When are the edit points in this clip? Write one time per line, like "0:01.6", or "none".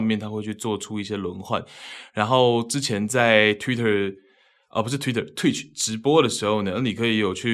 none